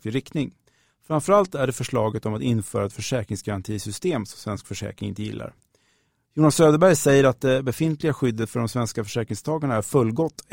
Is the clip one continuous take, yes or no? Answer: yes